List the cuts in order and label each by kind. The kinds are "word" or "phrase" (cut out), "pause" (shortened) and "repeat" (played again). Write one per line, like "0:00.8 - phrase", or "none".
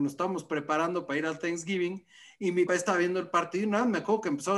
0:02.7 - word